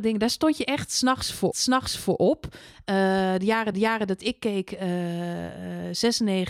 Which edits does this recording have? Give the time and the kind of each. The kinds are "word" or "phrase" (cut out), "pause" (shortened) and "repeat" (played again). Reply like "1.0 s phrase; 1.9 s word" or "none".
1.5 s repeat; 3.7 s repeat